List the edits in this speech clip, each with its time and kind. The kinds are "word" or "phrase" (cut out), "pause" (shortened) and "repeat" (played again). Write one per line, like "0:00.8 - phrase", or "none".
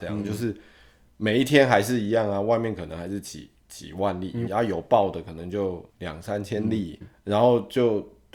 0:04.5 - phrase
0:05.9 - pause
0:07.0 - word